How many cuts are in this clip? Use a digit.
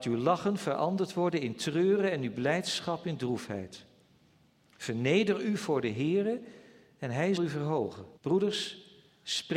2